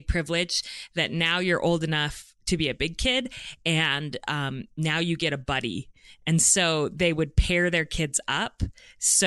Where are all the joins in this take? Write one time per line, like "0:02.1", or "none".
none

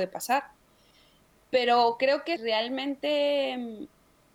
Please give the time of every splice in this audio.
0:02.4

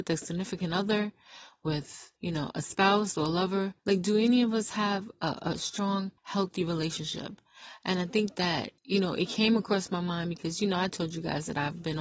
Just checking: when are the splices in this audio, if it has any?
0:02.2
0:03.8
0:06.2
0:08.8

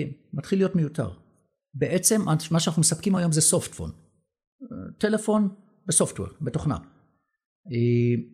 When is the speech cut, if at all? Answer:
none

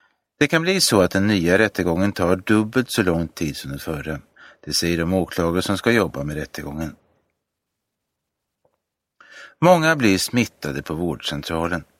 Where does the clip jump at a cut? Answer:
none

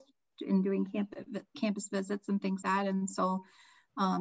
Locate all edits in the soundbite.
0:02.6

